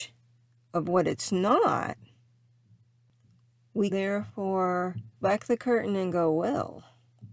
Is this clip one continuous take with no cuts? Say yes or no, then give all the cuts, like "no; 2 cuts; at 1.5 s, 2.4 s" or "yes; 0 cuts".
no; 2 cuts; at 3.9 s, 5.2 s